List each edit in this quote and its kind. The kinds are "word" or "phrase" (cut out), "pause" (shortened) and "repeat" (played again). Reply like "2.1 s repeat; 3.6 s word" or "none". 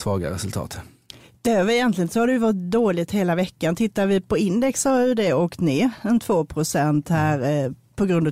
none